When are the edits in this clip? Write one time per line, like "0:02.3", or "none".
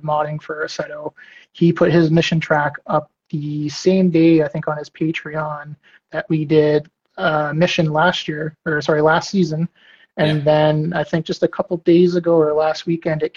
none

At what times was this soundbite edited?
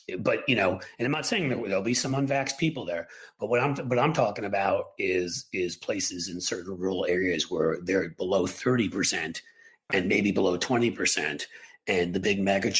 none

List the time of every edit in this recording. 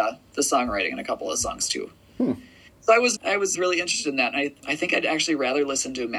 0:03.2
0:03.5
0:04.6

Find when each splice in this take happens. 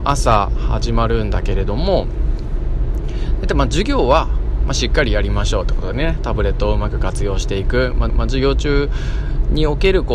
0:08.1

